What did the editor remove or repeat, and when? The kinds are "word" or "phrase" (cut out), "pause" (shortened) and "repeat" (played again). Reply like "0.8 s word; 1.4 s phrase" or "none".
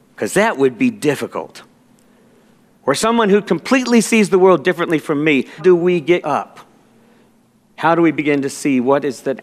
5.6 s word; 6.2 s word